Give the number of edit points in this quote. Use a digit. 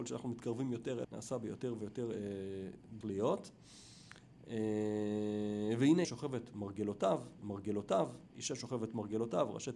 4